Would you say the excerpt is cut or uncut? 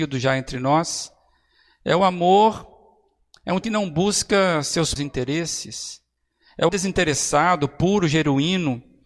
cut